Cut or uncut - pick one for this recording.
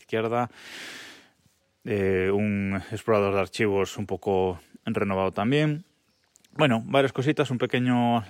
uncut